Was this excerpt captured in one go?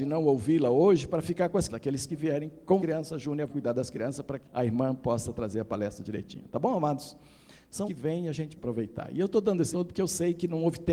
no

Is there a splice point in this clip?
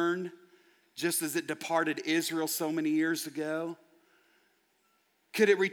no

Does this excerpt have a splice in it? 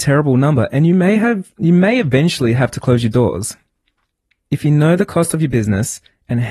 no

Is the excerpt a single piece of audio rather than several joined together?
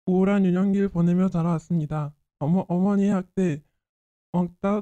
yes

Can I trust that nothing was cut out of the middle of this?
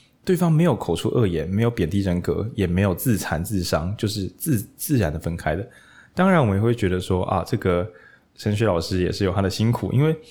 yes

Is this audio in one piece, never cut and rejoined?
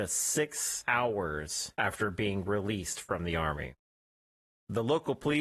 yes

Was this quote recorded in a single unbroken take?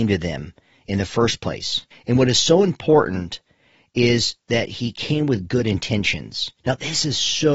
no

